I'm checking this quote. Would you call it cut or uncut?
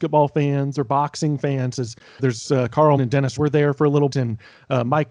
cut